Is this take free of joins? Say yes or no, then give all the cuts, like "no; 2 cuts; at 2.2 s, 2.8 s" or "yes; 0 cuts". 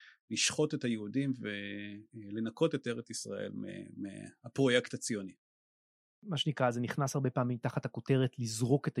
yes; 0 cuts